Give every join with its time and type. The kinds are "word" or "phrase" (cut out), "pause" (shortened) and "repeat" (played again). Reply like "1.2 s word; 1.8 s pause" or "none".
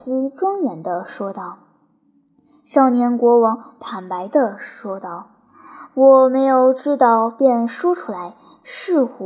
none